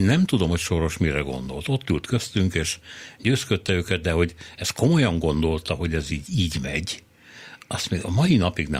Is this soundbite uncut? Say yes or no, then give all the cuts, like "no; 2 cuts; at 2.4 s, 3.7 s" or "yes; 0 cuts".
yes; 0 cuts